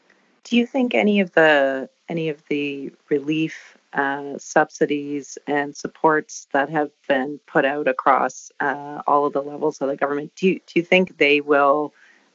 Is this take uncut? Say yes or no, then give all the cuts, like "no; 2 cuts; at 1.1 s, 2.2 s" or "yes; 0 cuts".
yes; 0 cuts